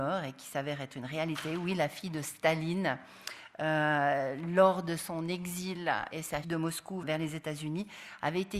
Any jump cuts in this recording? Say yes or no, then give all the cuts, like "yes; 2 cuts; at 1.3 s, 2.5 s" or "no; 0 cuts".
yes; 3 cuts; at 6.1 s, 6.4 s, 7.0 s